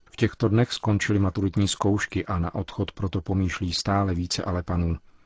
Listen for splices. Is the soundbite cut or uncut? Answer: uncut